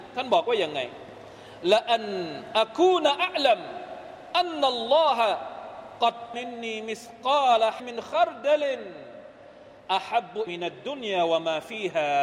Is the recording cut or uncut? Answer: cut